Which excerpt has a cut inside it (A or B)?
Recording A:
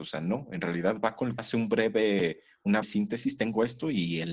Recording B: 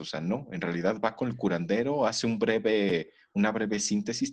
A